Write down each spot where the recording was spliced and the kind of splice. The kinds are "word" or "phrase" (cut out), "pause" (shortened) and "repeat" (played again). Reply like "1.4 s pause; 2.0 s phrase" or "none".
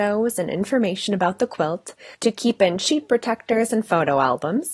2.1 s pause